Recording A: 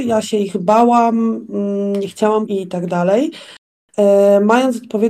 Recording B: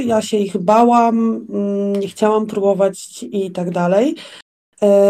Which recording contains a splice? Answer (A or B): A